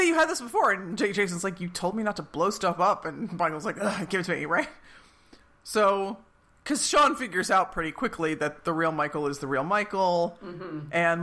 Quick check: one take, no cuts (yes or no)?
yes